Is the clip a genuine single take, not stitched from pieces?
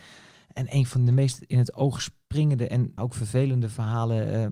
no; 1 cut; at 3.0 s

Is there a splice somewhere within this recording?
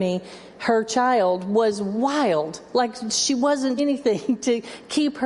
yes; 1 cut; at 3.8 s

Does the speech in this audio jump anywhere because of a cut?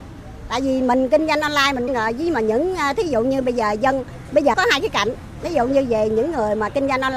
yes; 2 cuts; at 1.9 s, 4.5 s

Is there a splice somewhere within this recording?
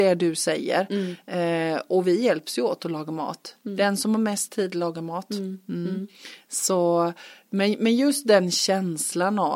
no; 0 cuts

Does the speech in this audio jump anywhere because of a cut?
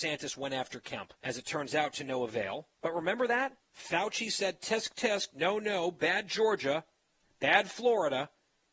yes; 3 cuts; at 1.1 s, 2.7 s, 3.6 s

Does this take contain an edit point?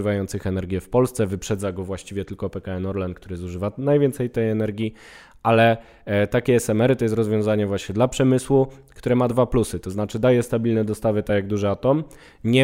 no; 0 cuts

